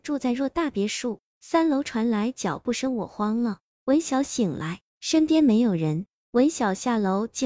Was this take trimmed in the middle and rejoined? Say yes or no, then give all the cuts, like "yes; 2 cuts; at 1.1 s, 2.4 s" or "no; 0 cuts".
yes; 1 cut; at 4.9 s